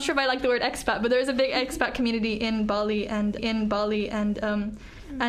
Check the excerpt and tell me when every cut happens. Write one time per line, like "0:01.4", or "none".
0:03.4